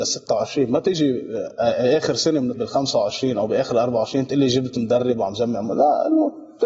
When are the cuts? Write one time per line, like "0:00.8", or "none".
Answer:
0:02.5